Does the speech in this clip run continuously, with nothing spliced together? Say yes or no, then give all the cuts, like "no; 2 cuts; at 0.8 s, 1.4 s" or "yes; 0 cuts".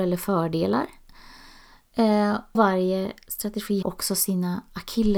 no; 2 cuts; at 2.5 s, 3.8 s